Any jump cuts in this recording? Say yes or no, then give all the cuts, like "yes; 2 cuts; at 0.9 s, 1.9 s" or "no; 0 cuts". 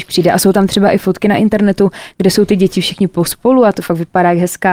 no; 0 cuts